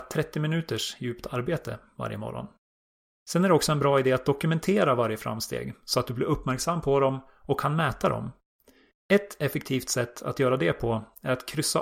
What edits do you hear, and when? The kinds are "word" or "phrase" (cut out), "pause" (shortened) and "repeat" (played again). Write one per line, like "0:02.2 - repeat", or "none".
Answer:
none